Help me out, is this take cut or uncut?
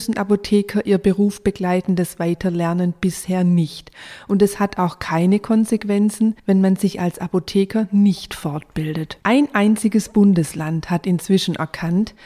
cut